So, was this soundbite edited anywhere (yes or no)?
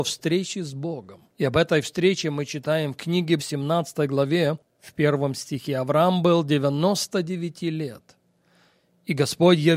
yes